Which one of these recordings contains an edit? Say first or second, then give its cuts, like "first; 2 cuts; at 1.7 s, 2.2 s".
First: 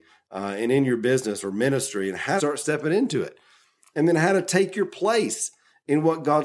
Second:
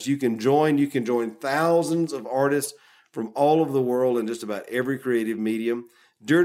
first; 1 cut; at 2.4 s